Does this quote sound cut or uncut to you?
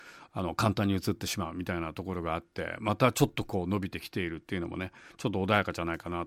uncut